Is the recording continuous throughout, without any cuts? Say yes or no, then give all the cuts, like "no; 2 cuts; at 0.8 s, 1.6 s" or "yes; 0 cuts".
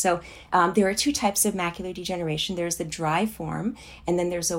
yes; 0 cuts